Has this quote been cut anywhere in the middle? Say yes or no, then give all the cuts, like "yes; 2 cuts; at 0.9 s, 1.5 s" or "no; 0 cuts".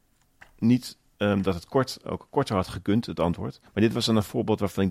yes; 2 cuts; at 1.0 s, 3.7 s